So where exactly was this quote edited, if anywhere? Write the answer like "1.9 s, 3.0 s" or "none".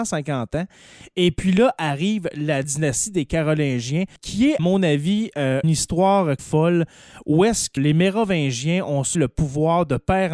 2.6 s, 4.2 s, 4.6 s, 5.6 s, 6.4 s, 7.8 s, 9.1 s